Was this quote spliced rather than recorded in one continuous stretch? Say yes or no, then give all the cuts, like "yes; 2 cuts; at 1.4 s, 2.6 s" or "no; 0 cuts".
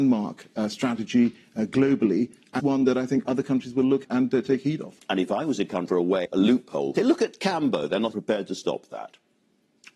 yes; 6 cuts; at 2.6 s, 4.0 s, 5.9 s, 6.2 s, 7.0 s, 8.1 s